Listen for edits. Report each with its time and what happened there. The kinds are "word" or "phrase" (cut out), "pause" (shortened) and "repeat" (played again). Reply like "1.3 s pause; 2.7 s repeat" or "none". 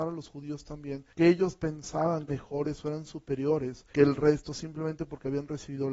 1.1 s pause; 2.3 s phrase; 3.9 s word